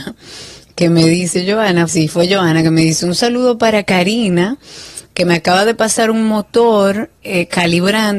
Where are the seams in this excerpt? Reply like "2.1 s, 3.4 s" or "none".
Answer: 1.9 s